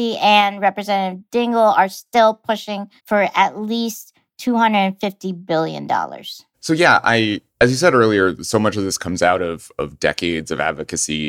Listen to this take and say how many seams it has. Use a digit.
3